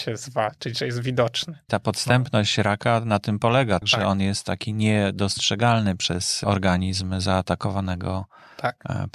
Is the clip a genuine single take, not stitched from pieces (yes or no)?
yes